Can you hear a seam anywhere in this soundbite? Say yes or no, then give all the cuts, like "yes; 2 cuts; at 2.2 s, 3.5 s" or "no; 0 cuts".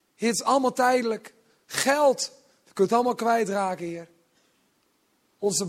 no; 0 cuts